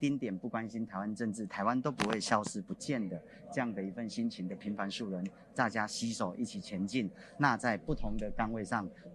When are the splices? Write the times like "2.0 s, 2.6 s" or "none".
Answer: none